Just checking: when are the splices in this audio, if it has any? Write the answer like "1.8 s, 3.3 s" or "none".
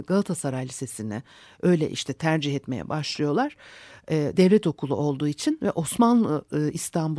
none